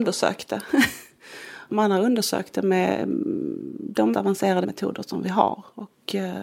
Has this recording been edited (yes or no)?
yes